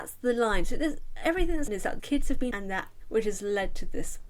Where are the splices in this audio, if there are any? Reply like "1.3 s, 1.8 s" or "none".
1.7 s, 2.0 s, 2.5 s, 3.0 s